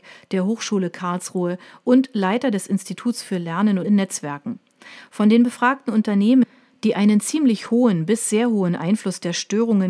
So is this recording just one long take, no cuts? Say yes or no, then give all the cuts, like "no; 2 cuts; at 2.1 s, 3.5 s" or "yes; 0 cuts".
no; 1 cut; at 3.8 s